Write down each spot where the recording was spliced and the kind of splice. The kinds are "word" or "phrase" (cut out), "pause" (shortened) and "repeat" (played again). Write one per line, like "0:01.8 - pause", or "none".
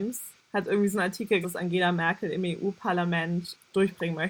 0:01.4 - phrase

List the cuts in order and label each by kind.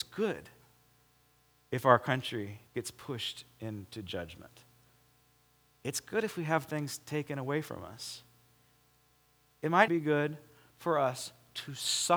0:02.7 - pause
0:09.9 - word

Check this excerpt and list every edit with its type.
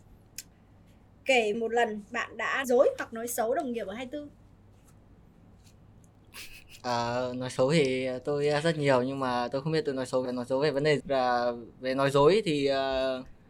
0:01.5 - word
0:02.6 - word
0:10.3 - word
0:11.0 - word

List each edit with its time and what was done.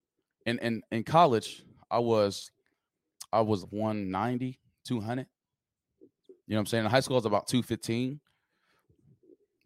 0:03.6 - word
0:06.4 - pause

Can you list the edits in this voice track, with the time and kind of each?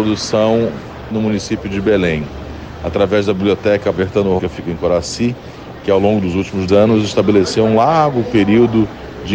0:01.1 - word
0:03.9 - word
0:04.4 - word
0:06.7 - word

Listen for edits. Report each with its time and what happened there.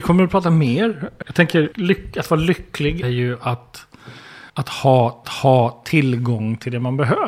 0:01.2 - word
0:01.7 - word
0:03.0 - word
0:04.5 - pause
0:05.2 - repeat

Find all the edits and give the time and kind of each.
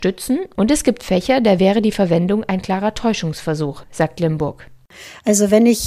none

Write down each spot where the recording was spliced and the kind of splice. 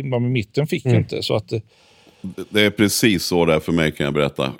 none

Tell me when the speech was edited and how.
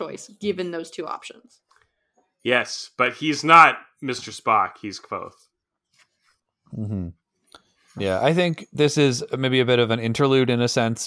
none

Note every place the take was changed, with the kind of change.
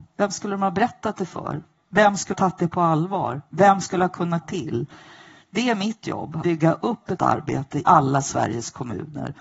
0:02.3 - word
0:04.4 - word
0:06.4 - word
0:07.2 - word
0:07.8 - word

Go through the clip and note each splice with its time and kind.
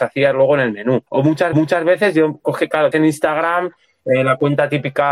0:01.1 - pause
0:01.5 - repeat
0:02.9 - phrase

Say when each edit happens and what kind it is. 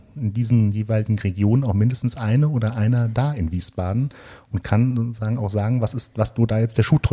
none

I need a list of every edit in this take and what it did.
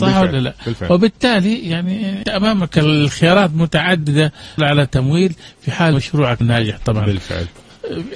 0:02.2 - word
0:04.6 - word
0:05.9 - word
0:06.4 - word

